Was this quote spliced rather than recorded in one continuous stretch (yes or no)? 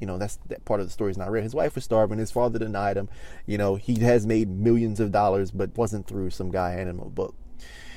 yes